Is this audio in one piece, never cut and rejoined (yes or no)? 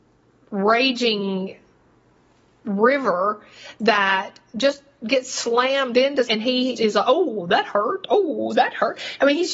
no